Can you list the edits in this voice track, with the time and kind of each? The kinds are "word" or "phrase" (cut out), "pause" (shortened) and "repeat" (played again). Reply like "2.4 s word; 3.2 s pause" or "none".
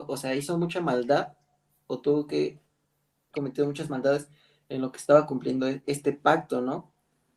3.3 s word; 5.8 s word